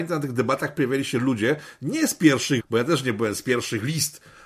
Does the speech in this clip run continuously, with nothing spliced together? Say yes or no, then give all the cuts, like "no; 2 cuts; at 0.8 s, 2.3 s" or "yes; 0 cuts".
no; 1 cut; at 2.6 s